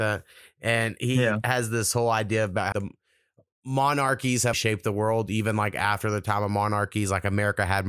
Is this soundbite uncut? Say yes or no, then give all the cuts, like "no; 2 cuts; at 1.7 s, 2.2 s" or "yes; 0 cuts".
no; 2 cuts; at 2.7 s, 4.5 s